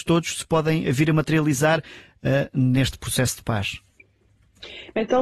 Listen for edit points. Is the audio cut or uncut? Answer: uncut